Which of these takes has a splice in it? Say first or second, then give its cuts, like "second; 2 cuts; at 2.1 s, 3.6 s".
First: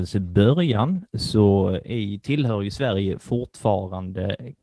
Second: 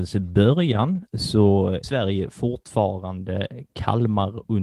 second; 1 cut; at 1.8 s